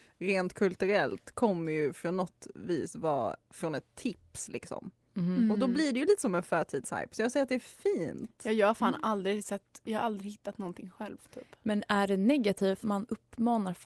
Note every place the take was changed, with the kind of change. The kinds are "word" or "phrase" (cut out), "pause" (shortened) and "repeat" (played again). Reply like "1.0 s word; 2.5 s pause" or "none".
12.8 s word